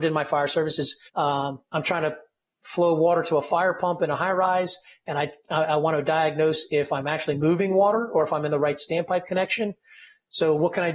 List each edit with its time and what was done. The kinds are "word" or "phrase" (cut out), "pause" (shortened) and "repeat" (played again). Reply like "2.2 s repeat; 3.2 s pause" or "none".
1.1 s pause